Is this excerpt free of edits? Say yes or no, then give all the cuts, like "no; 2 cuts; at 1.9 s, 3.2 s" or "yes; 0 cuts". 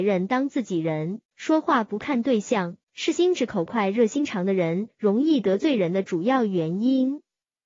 no; 2 cuts; at 1.3 s, 2.8 s